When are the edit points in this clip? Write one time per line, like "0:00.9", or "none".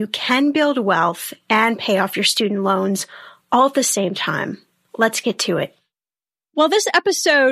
none